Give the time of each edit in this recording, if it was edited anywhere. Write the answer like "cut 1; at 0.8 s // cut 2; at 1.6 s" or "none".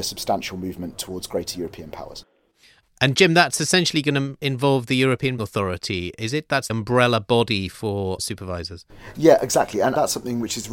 cut 1; at 5.4 s // cut 2; at 6.7 s // cut 3; at 8.2 s

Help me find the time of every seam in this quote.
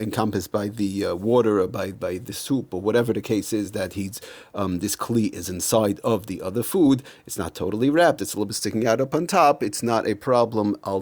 none

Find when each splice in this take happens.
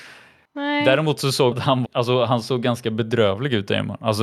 cut 1; at 1.5 s // cut 2; at 1.8 s

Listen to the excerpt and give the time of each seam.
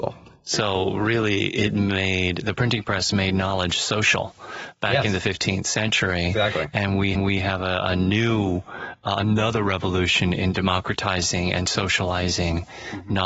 cut 1; at 7.1 s

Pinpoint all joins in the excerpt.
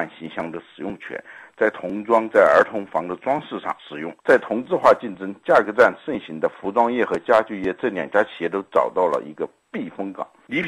cut 1; at 4.2 s

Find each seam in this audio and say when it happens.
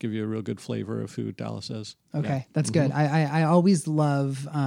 cut 1; at 2.0 s // cut 2; at 2.5 s

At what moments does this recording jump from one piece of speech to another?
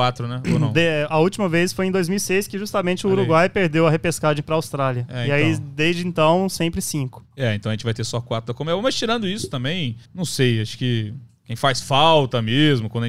cut 1; at 7.2 s // cut 2; at 10.1 s

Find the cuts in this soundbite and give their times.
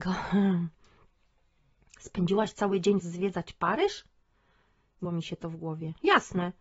cut 1; at 3.0 s // cut 2; at 5.0 s

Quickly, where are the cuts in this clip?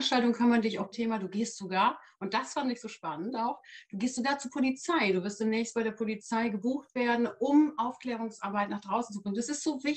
cut 1; at 0.9 s

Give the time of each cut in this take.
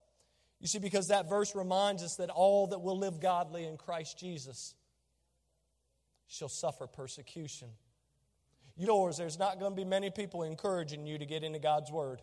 cut 1; at 8.8 s

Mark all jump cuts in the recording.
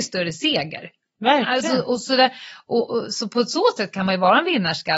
none

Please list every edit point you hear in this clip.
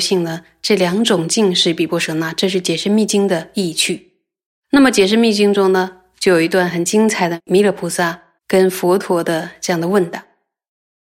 cut 1; at 8.4 s

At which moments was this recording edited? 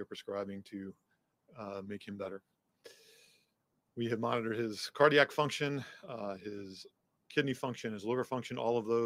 none

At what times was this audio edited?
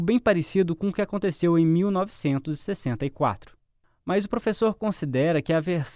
none

